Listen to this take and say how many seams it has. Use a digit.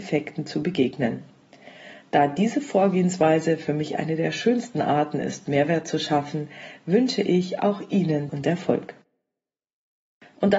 1